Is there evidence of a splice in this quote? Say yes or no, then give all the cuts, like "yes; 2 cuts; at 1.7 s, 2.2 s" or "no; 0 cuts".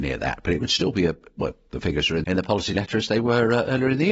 yes; 1 cut; at 2.2 s